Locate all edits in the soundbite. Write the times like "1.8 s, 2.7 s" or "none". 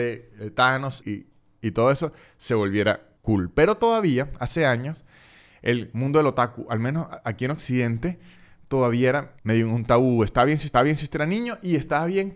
1.0 s, 3.2 s, 9.4 s, 10.7 s